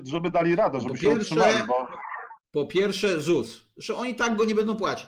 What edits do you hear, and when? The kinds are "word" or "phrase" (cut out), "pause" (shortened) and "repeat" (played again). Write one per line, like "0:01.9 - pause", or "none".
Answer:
0:02.4 - pause